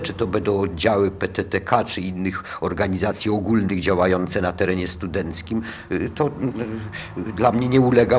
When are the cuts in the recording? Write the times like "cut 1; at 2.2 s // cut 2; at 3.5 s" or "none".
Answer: none